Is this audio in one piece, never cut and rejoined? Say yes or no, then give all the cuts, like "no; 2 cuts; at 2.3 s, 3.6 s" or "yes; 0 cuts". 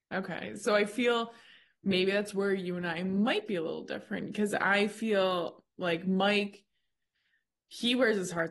yes; 0 cuts